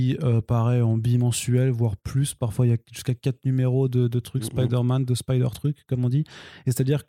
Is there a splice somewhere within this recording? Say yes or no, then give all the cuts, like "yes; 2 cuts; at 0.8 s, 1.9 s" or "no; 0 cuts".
no; 0 cuts